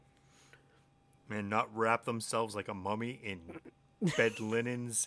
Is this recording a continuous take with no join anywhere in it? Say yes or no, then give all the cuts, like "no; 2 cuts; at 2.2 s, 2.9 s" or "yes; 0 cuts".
yes; 0 cuts